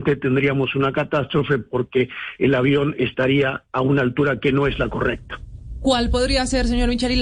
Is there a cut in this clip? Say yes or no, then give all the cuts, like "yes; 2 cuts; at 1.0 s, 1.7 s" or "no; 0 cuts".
no; 0 cuts